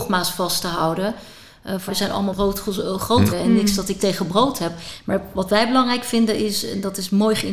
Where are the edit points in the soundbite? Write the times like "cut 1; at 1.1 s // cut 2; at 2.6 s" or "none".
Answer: cut 1; at 1.9 s // cut 2; at 2.3 s // cut 3; at 3.3 s // cut 4; at 4.0 s